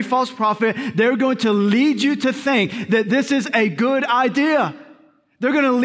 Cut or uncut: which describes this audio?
uncut